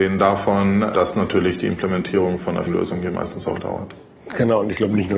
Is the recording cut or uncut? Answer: cut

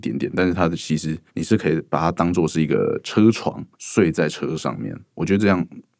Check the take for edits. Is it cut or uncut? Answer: cut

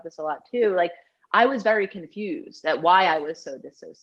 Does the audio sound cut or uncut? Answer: uncut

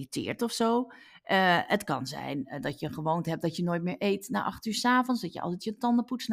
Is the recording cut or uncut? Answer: uncut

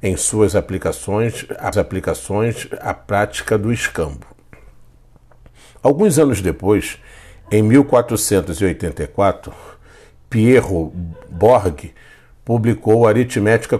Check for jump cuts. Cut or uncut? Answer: cut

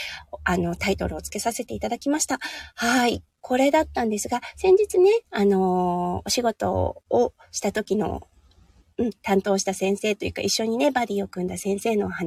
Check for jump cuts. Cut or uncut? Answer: uncut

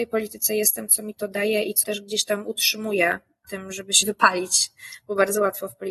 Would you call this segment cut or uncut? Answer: cut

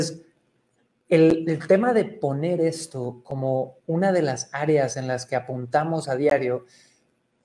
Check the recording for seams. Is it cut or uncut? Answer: uncut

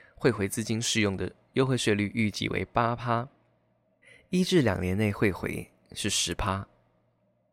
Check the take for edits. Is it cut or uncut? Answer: cut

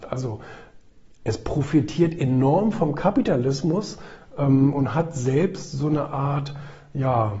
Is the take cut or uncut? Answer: uncut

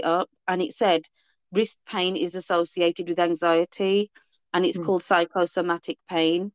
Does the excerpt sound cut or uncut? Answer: uncut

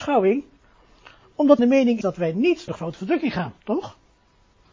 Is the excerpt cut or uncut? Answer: cut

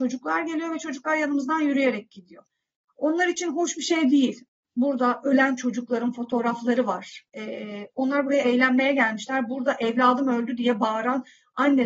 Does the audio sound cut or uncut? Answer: uncut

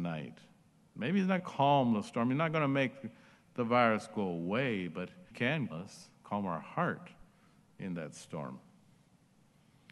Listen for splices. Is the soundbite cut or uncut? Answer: cut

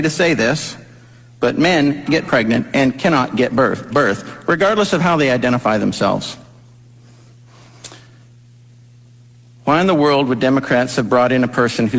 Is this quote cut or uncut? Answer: cut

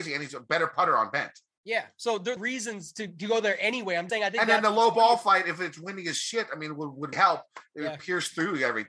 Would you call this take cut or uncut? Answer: cut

